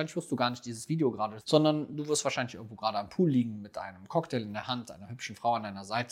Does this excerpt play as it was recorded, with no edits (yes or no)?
no